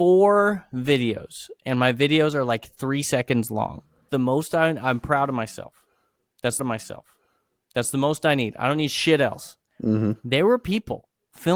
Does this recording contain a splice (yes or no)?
yes